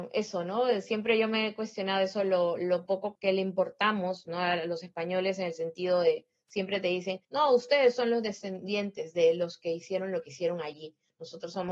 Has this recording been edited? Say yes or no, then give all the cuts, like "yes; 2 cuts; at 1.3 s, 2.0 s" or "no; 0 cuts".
yes; 2 cuts; at 3.2 s, 7.2 s